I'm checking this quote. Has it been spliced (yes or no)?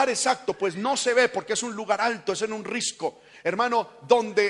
no